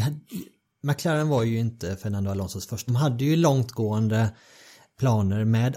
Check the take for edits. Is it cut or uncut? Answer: cut